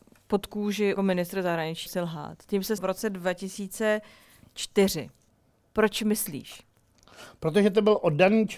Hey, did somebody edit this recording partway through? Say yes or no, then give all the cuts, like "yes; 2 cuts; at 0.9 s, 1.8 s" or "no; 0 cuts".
yes; 4 cuts; at 1.0 s, 1.9 s, 2.8 s, 5.3 s